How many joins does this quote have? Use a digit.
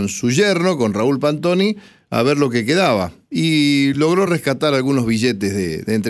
0